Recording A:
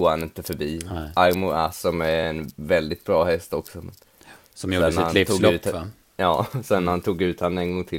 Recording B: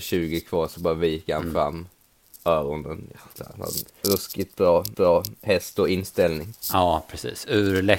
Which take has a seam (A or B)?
B